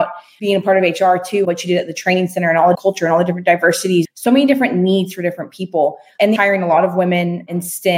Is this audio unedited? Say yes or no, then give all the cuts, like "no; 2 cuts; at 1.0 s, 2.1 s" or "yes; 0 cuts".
no; 4 cuts; at 1.4 s, 2.7 s, 4.0 s, 6.4 s